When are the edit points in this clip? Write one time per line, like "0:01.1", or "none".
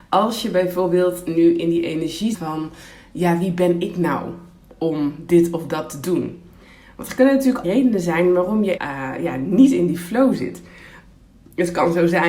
0:02.3
0:07.6
0:08.8